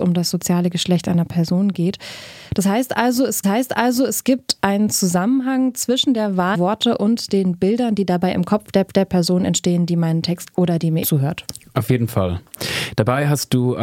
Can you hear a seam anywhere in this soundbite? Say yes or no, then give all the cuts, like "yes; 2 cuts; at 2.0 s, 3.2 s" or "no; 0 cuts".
yes; 5 cuts; at 3.4 s, 6.5 s, 8.9 s, 10.5 s, 11.0 s